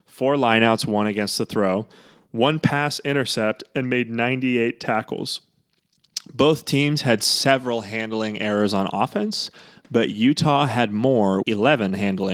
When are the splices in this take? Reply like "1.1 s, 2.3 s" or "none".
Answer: 11.4 s